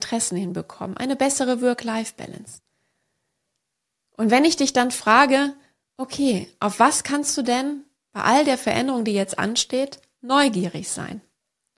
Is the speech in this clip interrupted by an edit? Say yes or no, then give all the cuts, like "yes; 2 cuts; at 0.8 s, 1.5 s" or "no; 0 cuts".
no; 0 cuts